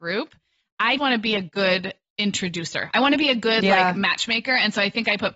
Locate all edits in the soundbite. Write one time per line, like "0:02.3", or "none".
0:01.0